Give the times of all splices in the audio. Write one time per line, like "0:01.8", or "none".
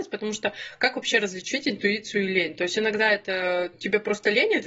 none